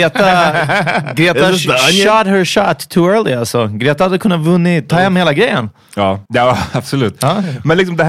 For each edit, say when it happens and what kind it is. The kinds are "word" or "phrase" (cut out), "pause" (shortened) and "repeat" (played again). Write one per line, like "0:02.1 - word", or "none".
0:06.3 - pause